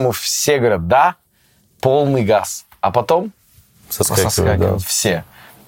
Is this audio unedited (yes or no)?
yes